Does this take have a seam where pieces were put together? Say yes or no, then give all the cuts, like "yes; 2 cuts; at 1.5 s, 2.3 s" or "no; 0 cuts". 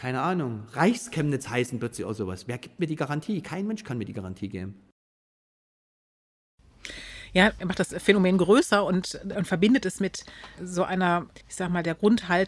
yes; 1 cut; at 11.4 s